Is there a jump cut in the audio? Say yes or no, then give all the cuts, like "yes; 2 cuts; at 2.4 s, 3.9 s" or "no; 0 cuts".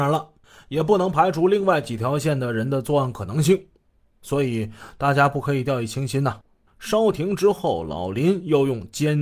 no; 0 cuts